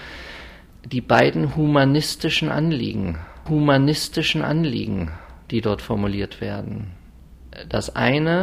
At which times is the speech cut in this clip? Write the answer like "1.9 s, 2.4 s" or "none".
3.5 s